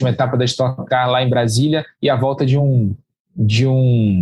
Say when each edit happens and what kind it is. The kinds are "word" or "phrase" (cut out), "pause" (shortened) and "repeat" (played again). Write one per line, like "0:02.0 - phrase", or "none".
none